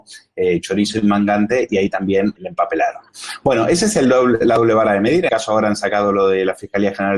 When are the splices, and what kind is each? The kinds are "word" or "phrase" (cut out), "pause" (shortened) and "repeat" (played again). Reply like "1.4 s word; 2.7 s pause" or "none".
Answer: 2.4 s word; 5.3 s word

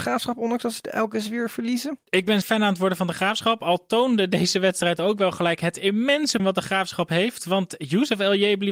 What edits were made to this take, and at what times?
2.1 s pause; 2.4 s word; 6.4 s word

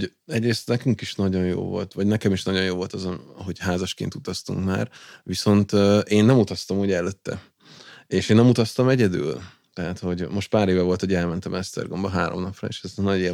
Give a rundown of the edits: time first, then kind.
none

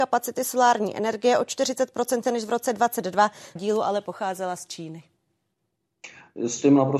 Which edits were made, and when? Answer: 2.2 s word; 3.6 s phrase

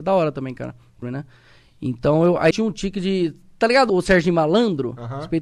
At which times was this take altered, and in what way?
1.0 s word; 2.5 s word; 3.9 s word

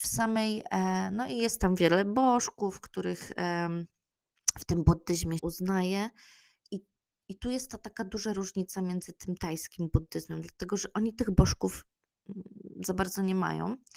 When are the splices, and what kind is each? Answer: 5.4 s word

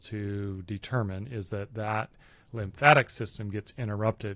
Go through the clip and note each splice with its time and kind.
none

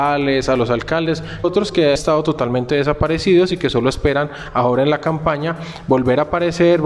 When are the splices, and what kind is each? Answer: 1.4 s word; 1.9 s word

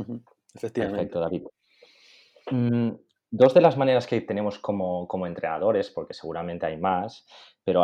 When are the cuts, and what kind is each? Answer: none

